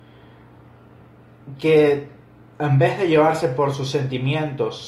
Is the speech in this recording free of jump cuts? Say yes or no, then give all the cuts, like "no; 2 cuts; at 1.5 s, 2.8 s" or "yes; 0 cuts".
yes; 0 cuts